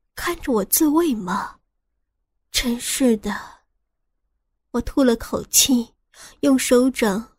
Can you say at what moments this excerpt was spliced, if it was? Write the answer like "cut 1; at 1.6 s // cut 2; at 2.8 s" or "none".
none